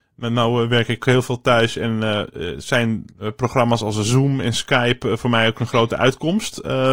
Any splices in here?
yes; 2 cuts; at 1.0 s, 3.1 s

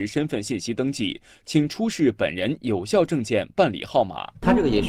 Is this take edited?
no; 0 cuts

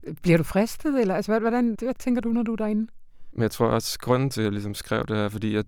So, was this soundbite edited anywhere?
yes; 1 cut; at 1.7 s

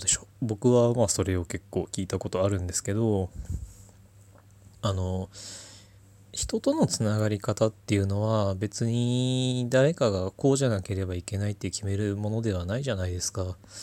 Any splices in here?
no; 0 cuts

